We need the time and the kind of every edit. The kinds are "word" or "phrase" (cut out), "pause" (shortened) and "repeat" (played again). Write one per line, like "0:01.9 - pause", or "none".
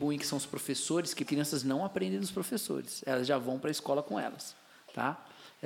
0:01.3 - phrase